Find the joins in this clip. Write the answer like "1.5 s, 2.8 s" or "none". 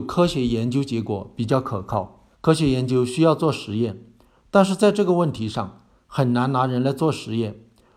2.3 s